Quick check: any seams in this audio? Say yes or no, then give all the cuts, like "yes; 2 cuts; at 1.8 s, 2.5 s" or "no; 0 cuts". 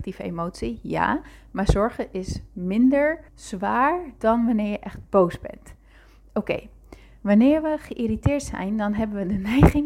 yes; 1 cut; at 3.3 s